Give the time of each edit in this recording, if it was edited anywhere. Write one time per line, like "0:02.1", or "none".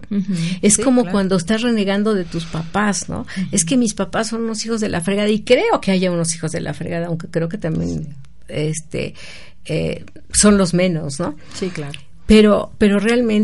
none